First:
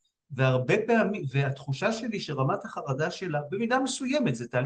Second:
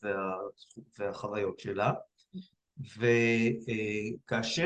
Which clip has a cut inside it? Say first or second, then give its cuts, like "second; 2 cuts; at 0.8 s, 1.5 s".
first; 1 cut; at 1.3 s